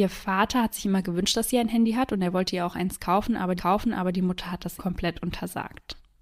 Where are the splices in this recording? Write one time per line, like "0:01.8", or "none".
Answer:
0:03.6
0:04.8